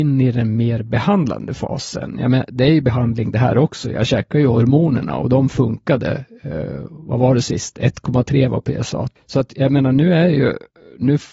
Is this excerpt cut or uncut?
uncut